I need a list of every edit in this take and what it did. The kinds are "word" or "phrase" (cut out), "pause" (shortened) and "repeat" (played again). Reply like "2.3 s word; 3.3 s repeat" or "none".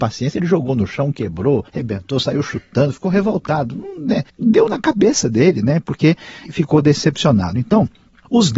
1.7 s pause; 4.3 s pause; 6.5 s word